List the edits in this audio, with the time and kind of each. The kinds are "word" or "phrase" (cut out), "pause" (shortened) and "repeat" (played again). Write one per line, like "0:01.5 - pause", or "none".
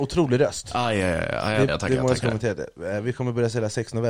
0:01.7 - word